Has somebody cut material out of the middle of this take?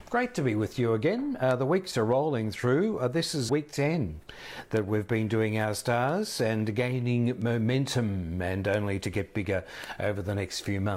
yes; 1 cut; at 3.5 s

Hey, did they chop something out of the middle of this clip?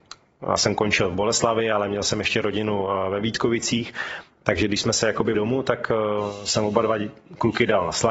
yes; 1 cut; at 5.3 s

